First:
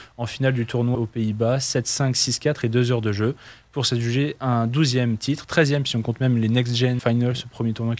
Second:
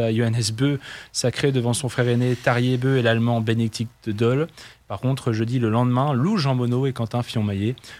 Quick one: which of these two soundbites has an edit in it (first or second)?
first